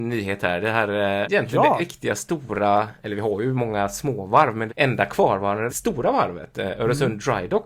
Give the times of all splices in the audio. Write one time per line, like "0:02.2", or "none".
0:01.2
0:01.8
0:04.7
0:05.7